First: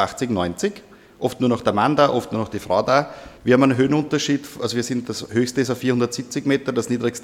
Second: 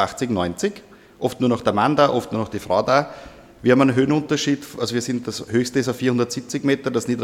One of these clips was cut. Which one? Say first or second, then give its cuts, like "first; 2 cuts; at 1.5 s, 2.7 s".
first; 1 cut; at 3.4 s